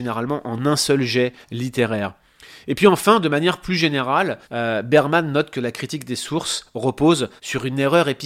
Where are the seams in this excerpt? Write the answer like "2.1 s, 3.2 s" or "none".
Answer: 1.4 s, 4.4 s, 7.4 s